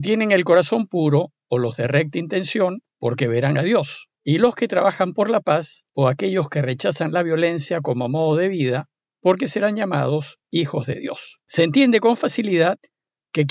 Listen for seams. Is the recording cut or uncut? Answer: cut